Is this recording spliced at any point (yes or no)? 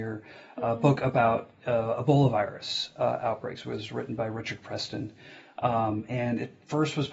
no